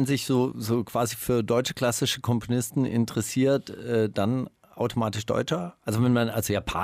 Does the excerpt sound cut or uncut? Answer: uncut